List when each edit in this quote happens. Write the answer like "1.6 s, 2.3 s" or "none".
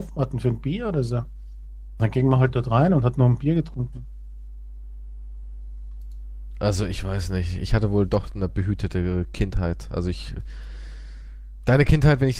none